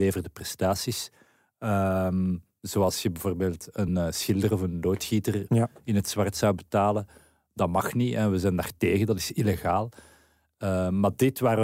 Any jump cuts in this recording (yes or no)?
no